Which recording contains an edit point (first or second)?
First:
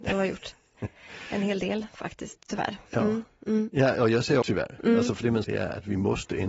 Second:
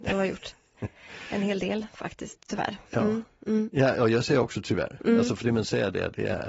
first